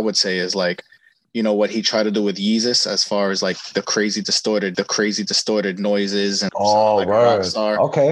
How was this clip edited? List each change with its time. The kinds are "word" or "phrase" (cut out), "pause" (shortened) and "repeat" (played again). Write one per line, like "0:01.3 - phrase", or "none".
0:04.7 - repeat
0:06.5 - word

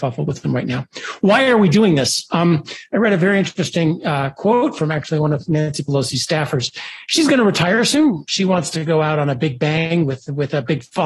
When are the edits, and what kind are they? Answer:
none

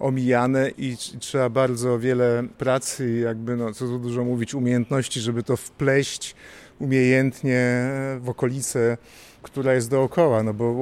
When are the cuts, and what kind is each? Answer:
none

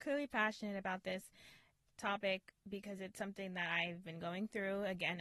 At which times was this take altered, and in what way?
none

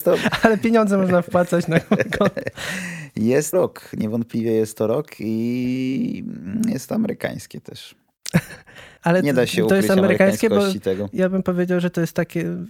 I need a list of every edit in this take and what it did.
0:03.5 - word
0:09.0 - pause

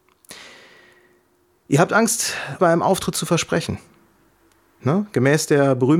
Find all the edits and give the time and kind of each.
0:02.6 - word

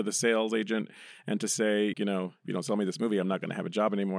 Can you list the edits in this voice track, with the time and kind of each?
0:01.9 - word

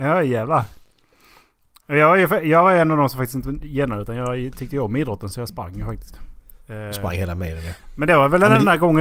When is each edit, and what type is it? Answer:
none

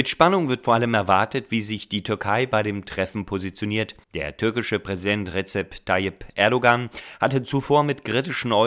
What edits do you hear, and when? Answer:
0:04.0 - pause

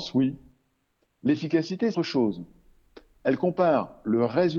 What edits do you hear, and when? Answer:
0:01.9 - word

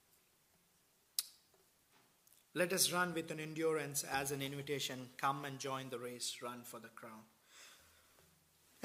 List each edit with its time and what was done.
none

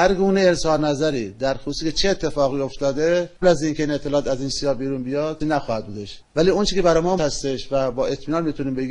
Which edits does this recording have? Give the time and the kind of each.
0:03.4 - word
0:04.5 - word
0:05.4 - word
0:07.2 - word

